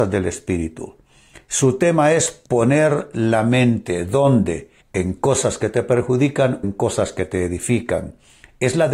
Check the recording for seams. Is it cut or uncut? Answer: cut